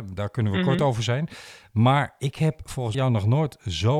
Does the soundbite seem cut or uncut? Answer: cut